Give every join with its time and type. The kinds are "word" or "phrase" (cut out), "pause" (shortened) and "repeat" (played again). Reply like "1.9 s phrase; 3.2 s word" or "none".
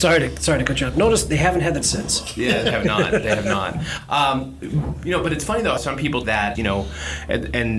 1.8 s word; 2.7 s word; 5.8 s word; 6.2 s word; 6.5 s word